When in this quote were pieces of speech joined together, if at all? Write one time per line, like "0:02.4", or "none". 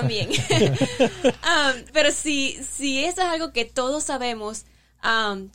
0:01.9